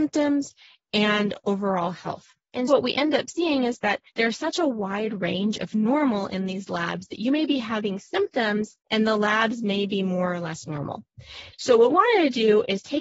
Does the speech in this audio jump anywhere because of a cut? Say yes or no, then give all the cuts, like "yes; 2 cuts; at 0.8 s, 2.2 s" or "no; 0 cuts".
yes; 4 cuts; at 2.7 s, 4.1 s, 8.8 s, 11.9 s